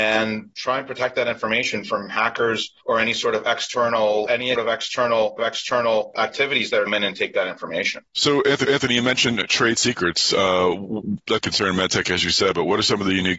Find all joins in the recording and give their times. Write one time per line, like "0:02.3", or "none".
0:02.8
0:04.6
0:05.4
0:06.9
0:08.1
0:08.7
0:11.4